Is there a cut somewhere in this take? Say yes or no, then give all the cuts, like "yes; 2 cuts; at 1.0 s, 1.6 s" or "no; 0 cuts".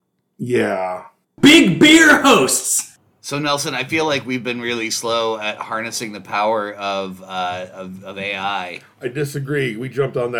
yes; 1 cut; at 1.2 s